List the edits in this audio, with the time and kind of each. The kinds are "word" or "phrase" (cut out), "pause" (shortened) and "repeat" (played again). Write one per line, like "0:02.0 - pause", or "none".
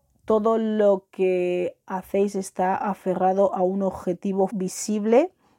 0:04.5 - word